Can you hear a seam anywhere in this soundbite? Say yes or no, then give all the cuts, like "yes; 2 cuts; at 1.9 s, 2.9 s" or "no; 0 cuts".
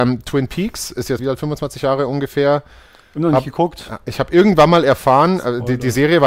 yes; 1 cut; at 1.2 s